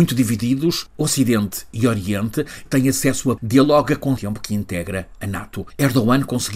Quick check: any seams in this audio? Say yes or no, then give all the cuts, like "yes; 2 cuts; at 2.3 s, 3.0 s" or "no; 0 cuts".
yes; 3 cuts; at 2.7 s, 3.4 s, 4.2 s